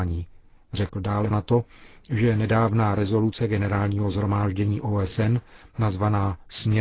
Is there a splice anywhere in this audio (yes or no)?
yes